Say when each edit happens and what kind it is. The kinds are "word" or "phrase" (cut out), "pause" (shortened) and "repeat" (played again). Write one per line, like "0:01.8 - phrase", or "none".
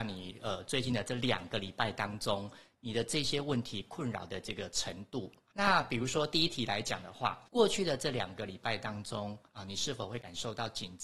0:07.5 - pause